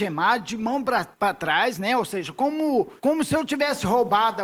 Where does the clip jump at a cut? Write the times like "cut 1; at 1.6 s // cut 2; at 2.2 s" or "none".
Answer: cut 1; at 1.1 s // cut 2; at 3.0 s